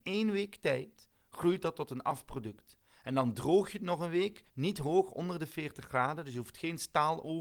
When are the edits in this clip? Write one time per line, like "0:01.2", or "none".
0:04.5